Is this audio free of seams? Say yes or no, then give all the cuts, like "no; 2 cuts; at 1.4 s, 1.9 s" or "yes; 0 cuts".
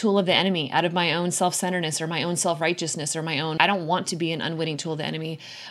no; 1 cut; at 3.6 s